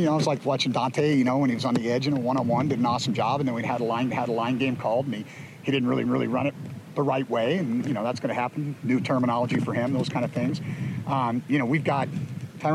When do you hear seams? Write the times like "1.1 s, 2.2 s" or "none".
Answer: 4.1 s, 6.1 s